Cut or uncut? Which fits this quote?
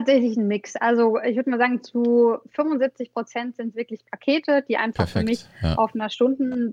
uncut